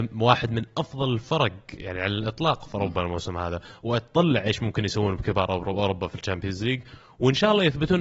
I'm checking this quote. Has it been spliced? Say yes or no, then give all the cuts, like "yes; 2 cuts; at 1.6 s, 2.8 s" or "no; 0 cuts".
no; 0 cuts